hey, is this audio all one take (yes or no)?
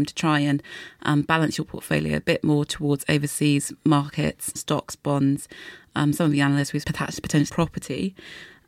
no